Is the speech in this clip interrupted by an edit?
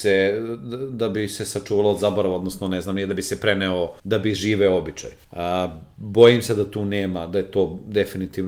yes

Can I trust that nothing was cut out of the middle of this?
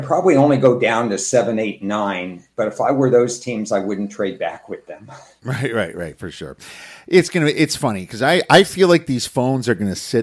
no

